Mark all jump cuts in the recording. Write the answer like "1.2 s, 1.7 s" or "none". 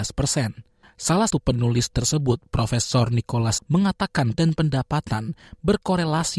1.3 s, 1.9 s, 3.6 s, 4.3 s